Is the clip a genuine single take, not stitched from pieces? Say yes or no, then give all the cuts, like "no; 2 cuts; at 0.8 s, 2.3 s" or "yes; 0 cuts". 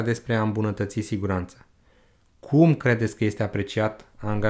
yes; 0 cuts